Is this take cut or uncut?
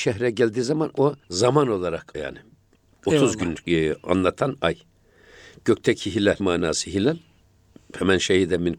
cut